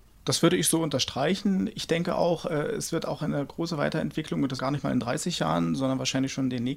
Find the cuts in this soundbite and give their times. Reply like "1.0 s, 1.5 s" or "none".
4.6 s

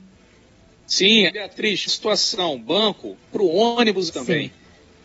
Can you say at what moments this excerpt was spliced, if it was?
1.3 s, 1.9 s, 3.3 s, 4.1 s

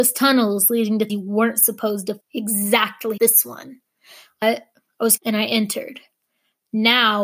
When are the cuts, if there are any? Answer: 1.1 s, 2.2 s, 3.2 s, 4.4 s, 5.2 s

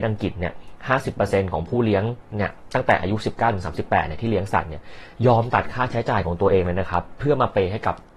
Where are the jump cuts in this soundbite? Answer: 2.3 s

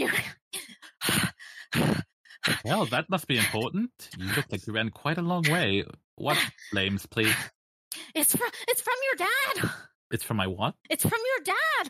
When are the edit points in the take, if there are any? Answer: 10.8 s

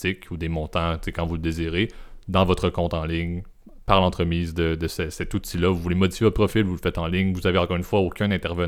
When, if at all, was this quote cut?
none

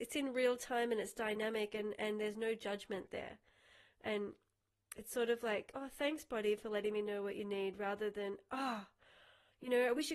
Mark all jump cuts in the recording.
none

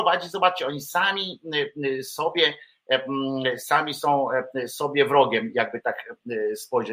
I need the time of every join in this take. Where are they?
none

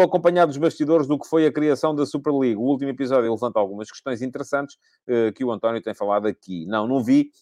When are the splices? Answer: none

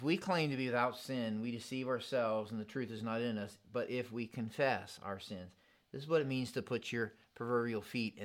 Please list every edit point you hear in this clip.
none

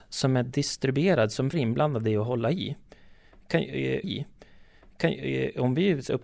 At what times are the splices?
1.5 s, 4.0 s

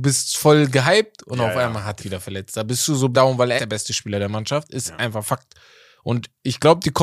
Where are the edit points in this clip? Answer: 2.0 s, 3.1 s, 3.6 s

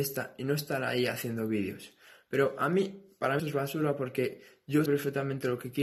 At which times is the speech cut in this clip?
3.4 s, 4.9 s

